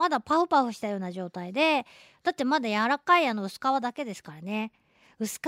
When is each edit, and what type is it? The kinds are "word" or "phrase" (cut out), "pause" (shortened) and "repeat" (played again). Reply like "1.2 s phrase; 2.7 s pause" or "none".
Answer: none